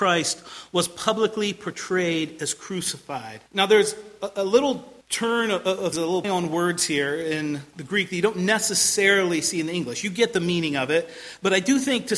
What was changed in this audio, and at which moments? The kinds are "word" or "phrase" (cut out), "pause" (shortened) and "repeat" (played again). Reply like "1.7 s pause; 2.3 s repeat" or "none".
3.5 s pause; 5.0 s pause; 5.9 s word; 6.2 s word; 7.7 s word